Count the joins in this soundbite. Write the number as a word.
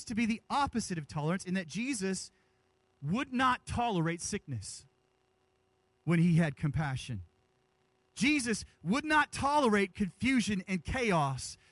zero